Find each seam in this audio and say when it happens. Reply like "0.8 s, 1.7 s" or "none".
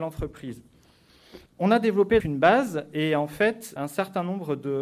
1.5 s, 2.2 s, 3.8 s